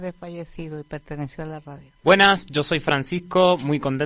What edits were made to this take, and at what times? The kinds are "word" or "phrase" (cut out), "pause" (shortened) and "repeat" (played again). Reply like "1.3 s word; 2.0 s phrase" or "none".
2.0 s pause